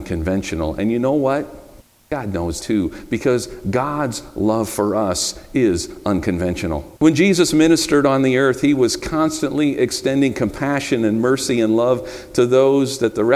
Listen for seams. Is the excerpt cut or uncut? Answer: cut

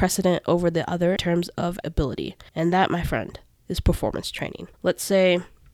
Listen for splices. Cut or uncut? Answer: cut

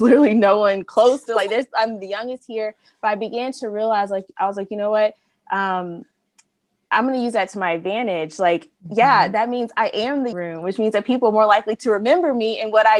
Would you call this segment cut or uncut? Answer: cut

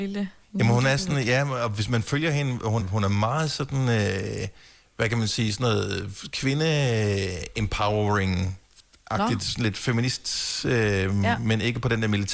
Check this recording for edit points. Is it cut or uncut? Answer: cut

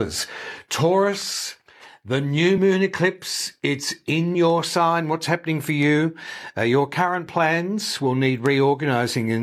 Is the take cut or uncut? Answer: uncut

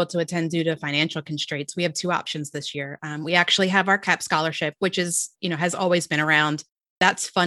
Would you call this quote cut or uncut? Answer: uncut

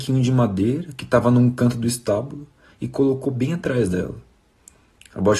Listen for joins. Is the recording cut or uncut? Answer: uncut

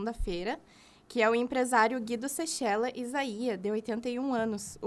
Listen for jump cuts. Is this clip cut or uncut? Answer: uncut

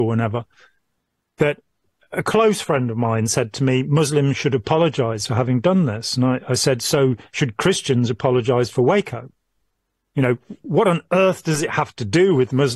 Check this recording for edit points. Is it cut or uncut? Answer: uncut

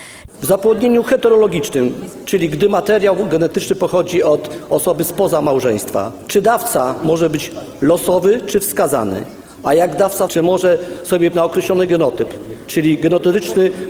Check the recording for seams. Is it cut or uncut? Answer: cut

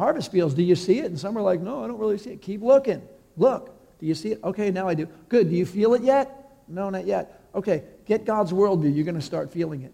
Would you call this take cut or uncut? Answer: uncut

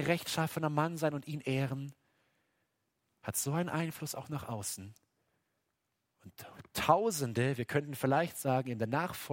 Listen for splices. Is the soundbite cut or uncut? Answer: uncut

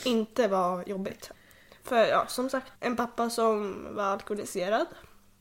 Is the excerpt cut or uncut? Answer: cut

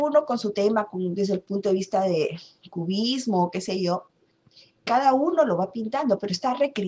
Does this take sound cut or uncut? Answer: uncut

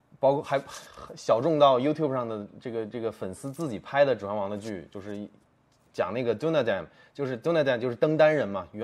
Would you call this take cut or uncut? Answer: uncut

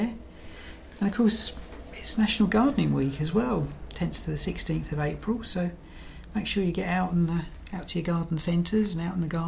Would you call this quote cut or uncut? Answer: uncut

